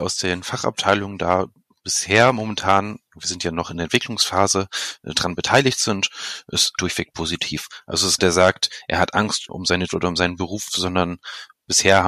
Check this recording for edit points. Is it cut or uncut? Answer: cut